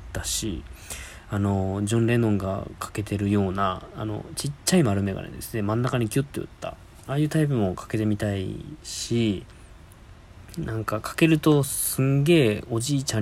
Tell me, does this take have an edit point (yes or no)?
no